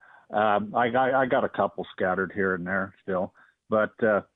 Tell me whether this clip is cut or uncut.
uncut